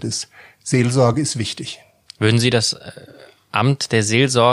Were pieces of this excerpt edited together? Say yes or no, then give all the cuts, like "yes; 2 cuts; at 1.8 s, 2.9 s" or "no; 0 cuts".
no; 0 cuts